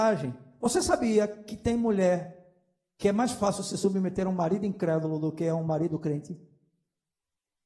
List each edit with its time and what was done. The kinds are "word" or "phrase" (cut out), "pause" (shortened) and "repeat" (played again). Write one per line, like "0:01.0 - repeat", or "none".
none